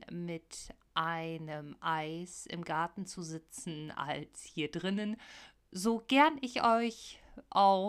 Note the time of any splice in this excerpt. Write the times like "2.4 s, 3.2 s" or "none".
none